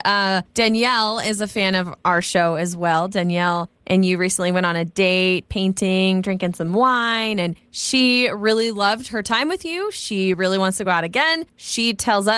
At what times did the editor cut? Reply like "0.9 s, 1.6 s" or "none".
none